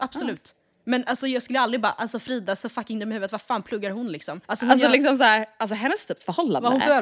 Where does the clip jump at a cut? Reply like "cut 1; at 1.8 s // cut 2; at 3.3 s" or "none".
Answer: cut 1; at 4.4 s

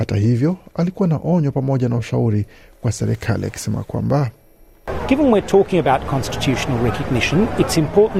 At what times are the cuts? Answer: none

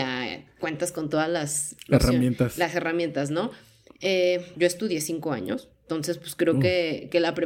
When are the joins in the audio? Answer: cut 1; at 4.5 s

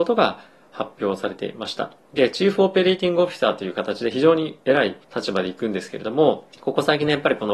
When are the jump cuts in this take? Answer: cut 1; at 5.0 s // cut 2; at 6.5 s

